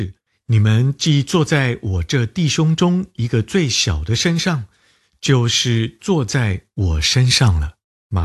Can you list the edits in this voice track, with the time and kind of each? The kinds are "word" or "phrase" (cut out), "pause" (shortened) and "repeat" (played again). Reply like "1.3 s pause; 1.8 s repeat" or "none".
none